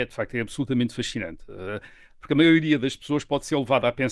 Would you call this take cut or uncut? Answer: uncut